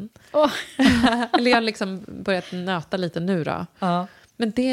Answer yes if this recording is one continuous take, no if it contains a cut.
yes